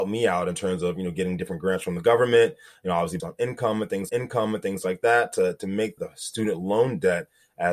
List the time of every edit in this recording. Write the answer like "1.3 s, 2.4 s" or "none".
3.2 s, 4.1 s, 6.0 s

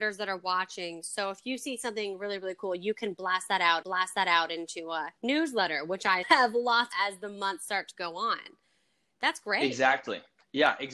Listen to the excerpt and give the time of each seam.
3.8 s, 5.2 s, 6.2 s, 6.9 s

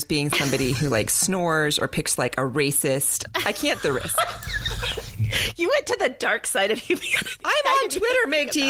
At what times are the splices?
2.2 s, 3.8 s

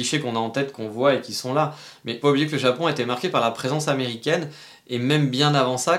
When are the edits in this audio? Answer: 2.2 s

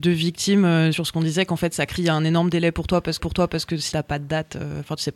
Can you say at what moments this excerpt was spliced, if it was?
0.9 s, 2.0 s, 3.2 s, 3.9 s

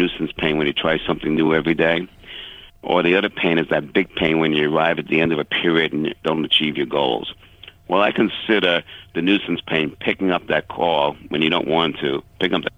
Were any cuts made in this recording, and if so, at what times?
none

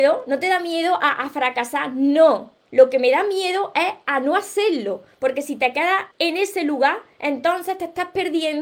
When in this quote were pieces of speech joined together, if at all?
6.1 s

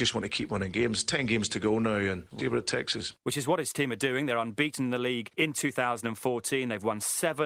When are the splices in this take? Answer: 2.4 s

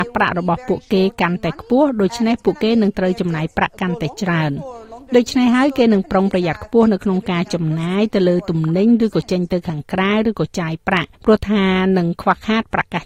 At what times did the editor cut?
11.1 s

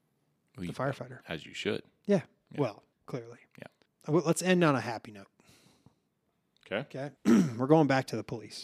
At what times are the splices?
2.9 s, 7.2 s

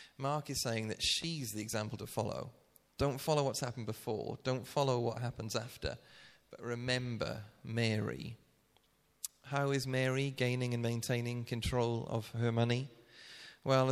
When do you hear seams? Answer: none

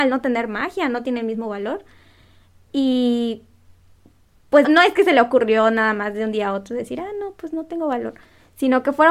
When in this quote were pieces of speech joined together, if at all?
4.6 s

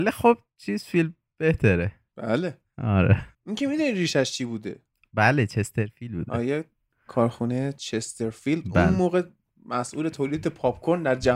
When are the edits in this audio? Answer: 3.3 s

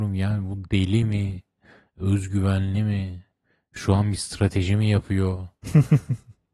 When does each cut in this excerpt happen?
none

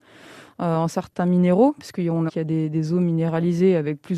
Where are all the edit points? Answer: 2.3 s

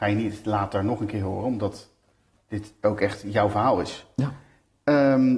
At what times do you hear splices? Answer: none

